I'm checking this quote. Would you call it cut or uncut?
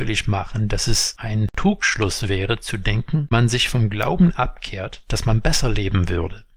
cut